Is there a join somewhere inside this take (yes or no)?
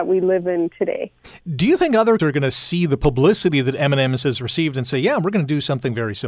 yes